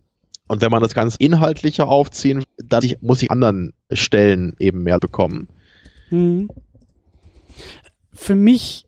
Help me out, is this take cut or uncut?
cut